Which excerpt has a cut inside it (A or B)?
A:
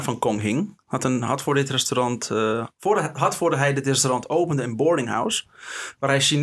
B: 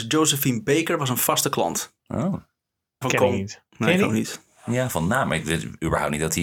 B